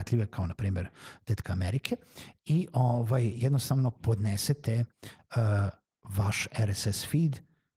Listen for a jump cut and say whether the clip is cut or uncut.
uncut